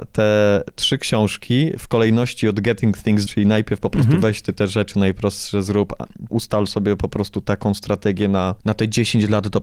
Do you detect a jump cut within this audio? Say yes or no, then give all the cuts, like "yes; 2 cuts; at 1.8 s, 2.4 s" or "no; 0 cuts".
yes; 3 cuts; at 3.3 s, 6.3 s, 8.6 s